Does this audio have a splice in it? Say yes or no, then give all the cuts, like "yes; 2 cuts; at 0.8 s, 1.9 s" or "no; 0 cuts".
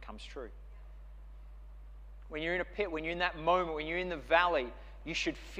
no; 0 cuts